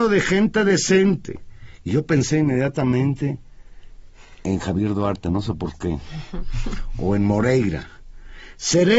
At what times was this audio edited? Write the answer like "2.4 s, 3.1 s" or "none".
none